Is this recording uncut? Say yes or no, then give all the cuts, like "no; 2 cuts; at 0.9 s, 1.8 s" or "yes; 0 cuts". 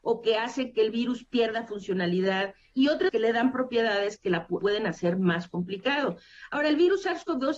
no; 2 cuts; at 3.1 s, 4.6 s